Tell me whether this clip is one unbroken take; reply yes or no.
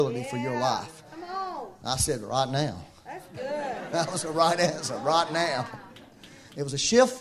yes